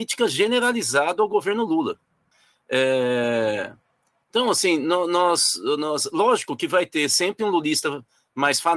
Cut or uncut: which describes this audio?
uncut